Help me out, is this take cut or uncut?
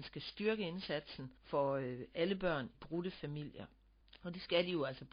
cut